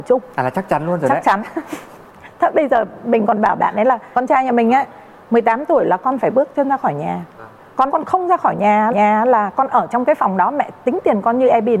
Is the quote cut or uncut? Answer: cut